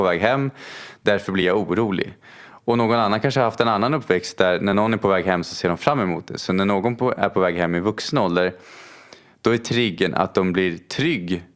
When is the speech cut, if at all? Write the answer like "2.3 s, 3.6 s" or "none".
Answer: none